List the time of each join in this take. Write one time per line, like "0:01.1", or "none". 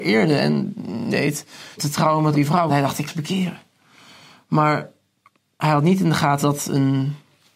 0:01.1
0:01.8
0:02.3
0:02.7
0:03.1
0:06.4